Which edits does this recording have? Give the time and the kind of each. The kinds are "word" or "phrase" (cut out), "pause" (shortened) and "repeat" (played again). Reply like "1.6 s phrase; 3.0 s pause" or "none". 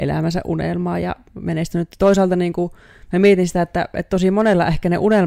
none